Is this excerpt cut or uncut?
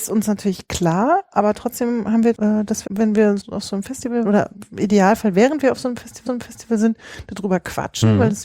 cut